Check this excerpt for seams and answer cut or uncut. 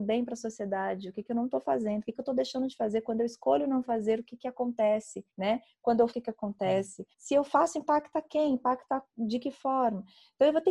cut